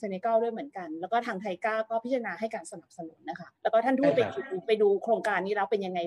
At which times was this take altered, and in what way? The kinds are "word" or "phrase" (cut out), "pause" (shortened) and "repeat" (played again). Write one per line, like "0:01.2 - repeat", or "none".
0:03.6 - pause